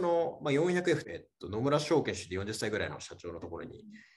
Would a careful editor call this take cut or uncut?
cut